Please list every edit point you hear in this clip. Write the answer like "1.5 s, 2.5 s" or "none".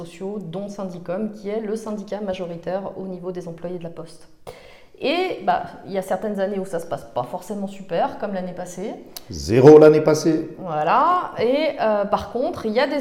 none